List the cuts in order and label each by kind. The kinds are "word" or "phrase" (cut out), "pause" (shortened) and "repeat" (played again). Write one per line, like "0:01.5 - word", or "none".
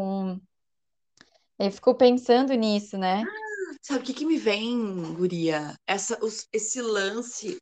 0:05.8 - pause